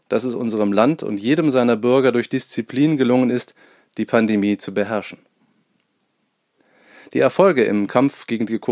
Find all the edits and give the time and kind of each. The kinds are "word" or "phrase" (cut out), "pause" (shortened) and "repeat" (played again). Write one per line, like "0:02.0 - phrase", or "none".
none